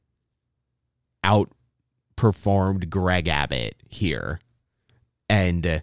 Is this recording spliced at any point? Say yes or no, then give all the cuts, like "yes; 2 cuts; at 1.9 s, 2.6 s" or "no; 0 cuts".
no; 0 cuts